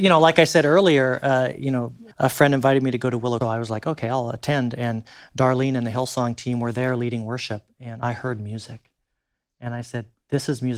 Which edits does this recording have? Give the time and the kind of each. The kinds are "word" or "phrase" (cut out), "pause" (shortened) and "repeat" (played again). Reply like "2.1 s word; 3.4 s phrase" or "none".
2.1 s pause; 3.4 s phrase